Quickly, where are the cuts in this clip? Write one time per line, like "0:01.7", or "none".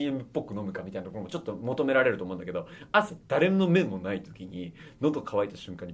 none